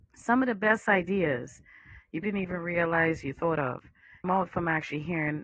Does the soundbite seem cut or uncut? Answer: cut